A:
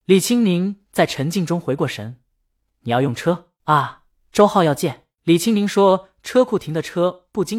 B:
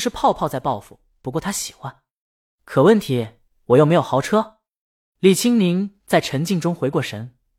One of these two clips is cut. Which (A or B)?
A